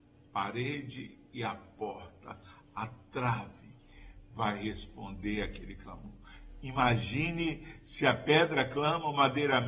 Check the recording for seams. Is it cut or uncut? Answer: uncut